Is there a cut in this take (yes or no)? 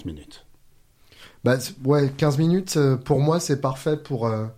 no